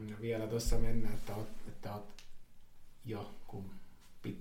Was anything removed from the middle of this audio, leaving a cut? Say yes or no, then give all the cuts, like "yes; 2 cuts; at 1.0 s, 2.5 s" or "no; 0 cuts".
yes; 1 cut; at 1.7 s